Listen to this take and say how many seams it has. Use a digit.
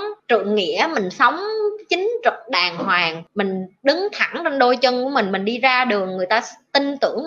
0